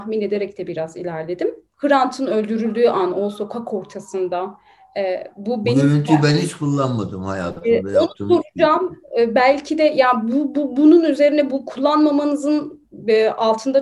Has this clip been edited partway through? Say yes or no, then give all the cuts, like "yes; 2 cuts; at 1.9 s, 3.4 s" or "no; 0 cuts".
no; 0 cuts